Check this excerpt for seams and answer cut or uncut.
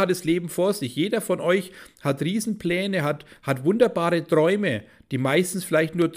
uncut